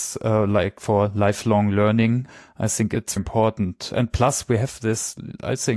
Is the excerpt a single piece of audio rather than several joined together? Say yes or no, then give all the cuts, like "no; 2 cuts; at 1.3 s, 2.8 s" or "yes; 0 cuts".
no; 1 cut; at 3.2 s